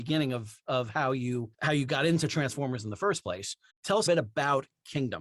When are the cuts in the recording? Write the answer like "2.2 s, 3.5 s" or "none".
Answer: 1.5 s, 3.7 s, 4.1 s